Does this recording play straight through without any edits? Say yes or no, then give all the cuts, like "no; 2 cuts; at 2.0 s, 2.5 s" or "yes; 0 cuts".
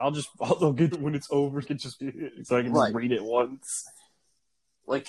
no; 3 cuts; at 0.9 s, 1.6 s, 2.0 s